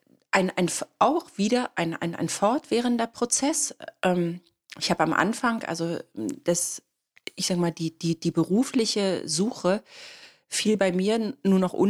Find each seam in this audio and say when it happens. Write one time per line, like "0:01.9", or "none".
none